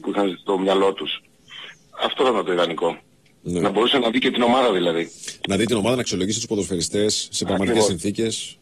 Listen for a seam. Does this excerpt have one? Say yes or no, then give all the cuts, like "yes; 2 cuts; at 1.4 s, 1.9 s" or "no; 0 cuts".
no; 0 cuts